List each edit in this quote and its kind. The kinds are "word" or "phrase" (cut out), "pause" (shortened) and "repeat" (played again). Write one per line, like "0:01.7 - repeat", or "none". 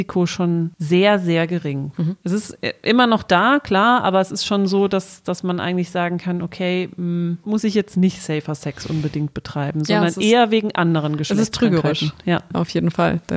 0:07.4 - phrase

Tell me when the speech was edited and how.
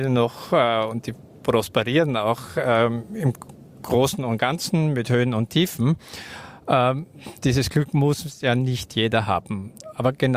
none

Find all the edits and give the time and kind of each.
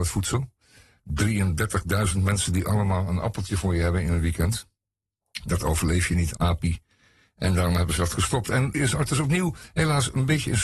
0:06.4 - word
0:08.7 - word

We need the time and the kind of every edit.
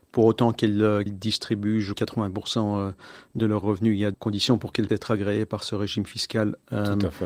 0:01.1 - word
0:01.9 - phrase
0:03.4 - phrase
0:04.1 - word
0:04.9 - word

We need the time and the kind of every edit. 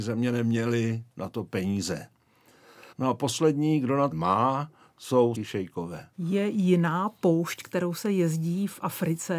0:01.1 - pause
0:02.9 - pause
0:04.1 - phrase
0:05.3 - word
0:06.1 - pause

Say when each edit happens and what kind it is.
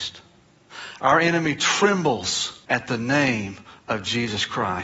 0:02.6 - pause

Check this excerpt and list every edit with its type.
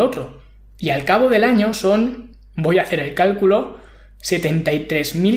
none

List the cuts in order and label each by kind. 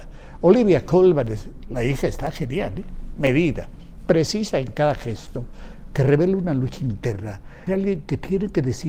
0:07.7 - word

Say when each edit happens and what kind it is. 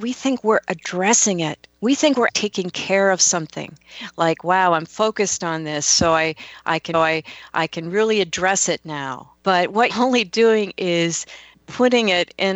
0:01.7 - pause
0:02.3 - word
0:06.9 - repeat
0:09.4 - pause
0:09.9 - word
0:11.5 - pause

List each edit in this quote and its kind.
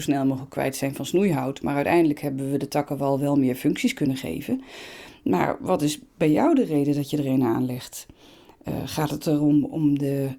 none

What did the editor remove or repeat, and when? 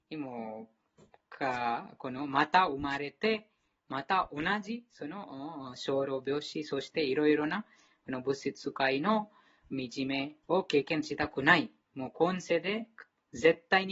0:10.4 - pause

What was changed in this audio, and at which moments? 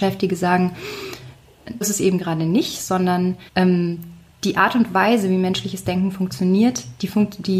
0:01.8 - word
0:03.5 - pause

